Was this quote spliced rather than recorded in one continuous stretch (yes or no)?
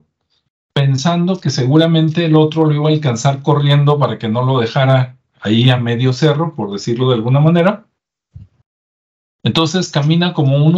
no